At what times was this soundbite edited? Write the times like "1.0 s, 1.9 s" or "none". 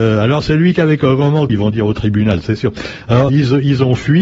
1.5 s, 3.3 s